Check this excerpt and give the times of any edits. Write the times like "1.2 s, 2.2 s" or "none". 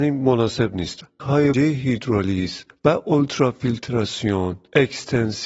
1.2 s, 1.5 s